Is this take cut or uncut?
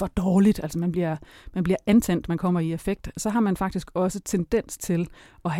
uncut